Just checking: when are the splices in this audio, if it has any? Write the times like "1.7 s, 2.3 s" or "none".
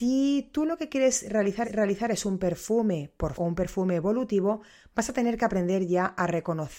1.6 s, 3.3 s